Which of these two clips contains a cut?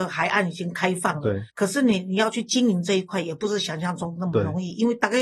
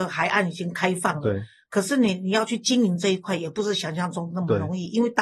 first; 1 cut; at 1.5 s

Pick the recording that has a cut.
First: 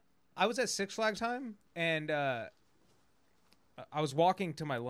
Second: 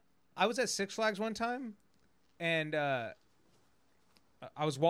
first; 2 cuts; at 1.2 s, 1.7 s

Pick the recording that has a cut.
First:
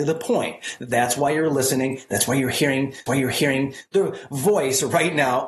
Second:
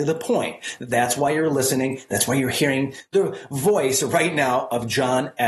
first; 1 cut; at 3.1 s

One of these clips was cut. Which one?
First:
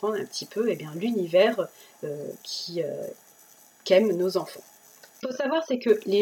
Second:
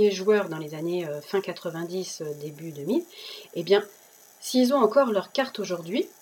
first; 1 cut; at 5.2 s

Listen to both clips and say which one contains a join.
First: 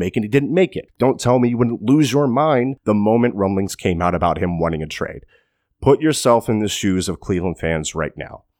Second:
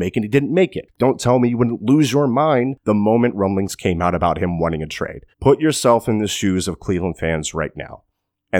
second; 1 cut; at 5.3 s

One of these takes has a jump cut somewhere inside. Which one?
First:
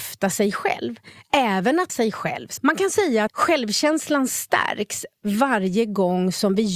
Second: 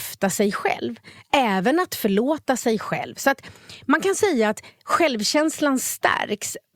first; 3 cuts; at 1.9 s, 2.6 s, 3.3 s

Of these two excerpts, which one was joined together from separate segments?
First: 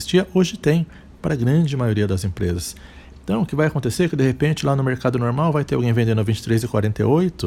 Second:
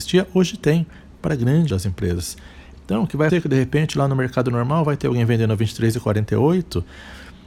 second; 2 cuts; at 1.7 s, 3.3 s

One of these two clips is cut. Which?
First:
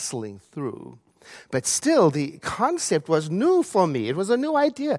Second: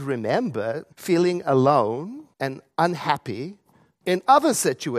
second; 2 cuts; at 0.9 s, 2.3 s

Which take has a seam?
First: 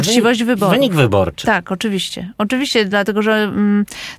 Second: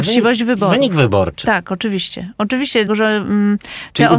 second; 1 cut; at 2.9 s

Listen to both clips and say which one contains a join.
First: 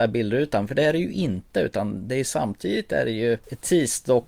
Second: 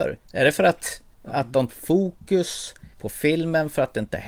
second; 3 cuts; at 1.1 s, 1.7 s, 2.9 s

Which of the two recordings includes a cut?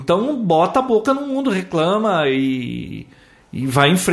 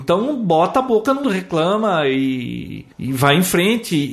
second; 2 cuts; at 1.2 s, 2.9 s

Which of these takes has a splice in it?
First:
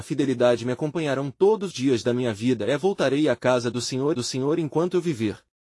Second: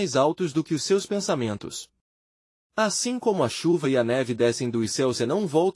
first; 2 cuts; at 1.7 s, 4.1 s

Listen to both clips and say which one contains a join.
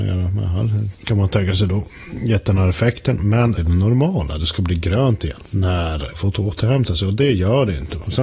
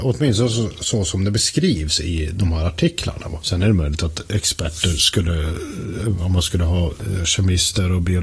first; 2 cuts; at 3.6 s, 6.1 s

